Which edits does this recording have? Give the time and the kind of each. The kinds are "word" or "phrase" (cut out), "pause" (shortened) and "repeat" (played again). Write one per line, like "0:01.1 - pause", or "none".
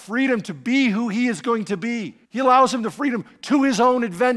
0:02.2 - pause